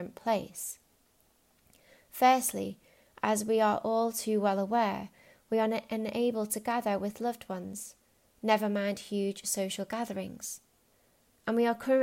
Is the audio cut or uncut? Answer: uncut